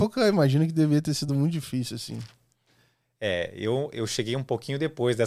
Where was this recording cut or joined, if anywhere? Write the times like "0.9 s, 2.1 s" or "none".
none